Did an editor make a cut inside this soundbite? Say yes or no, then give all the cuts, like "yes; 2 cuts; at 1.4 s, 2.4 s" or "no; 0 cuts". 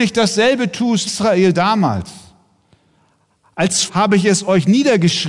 yes; 2 cuts; at 1.1 s, 3.9 s